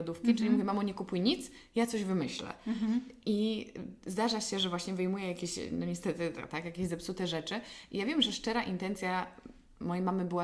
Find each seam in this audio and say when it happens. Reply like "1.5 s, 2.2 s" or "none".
none